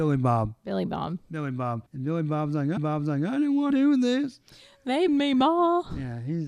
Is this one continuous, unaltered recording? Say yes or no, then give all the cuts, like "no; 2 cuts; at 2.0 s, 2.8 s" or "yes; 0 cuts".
no; 4 cuts; at 1.9 s, 2.8 s, 3.7 s, 5.1 s